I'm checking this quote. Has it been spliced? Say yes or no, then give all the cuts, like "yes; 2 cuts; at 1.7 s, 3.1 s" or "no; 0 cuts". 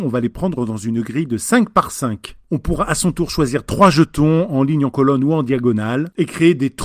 no; 0 cuts